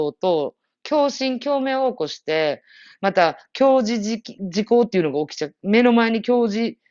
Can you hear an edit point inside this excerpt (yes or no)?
no